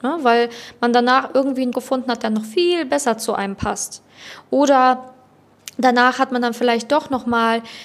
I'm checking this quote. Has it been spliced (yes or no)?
yes